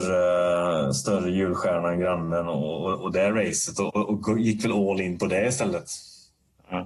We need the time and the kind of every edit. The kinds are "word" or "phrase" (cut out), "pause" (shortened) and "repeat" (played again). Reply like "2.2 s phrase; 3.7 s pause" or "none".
none